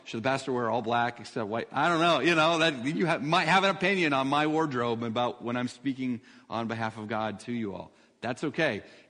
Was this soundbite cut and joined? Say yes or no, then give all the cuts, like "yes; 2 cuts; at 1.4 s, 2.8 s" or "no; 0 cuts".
no; 0 cuts